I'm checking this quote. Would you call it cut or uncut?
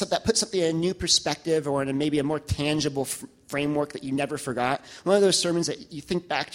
uncut